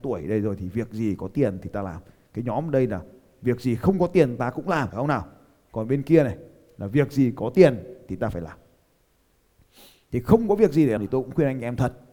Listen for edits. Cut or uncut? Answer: cut